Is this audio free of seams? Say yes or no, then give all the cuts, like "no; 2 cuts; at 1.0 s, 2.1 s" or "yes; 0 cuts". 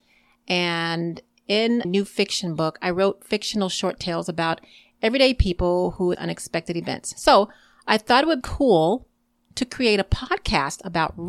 no; 3 cuts; at 1.8 s, 6.1 s, 8.4 s